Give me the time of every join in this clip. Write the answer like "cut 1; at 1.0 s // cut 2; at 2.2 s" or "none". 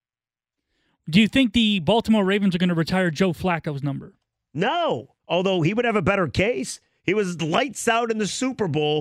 cut 1; at 5.2 s